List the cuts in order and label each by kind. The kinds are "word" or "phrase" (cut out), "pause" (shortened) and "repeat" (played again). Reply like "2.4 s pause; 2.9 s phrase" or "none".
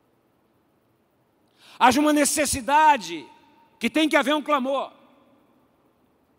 none